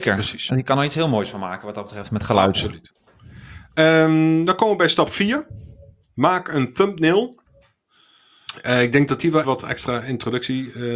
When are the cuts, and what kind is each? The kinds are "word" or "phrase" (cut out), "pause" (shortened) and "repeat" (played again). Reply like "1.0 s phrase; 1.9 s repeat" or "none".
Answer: 9.4 s word